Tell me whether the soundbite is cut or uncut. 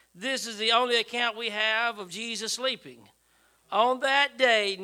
uncut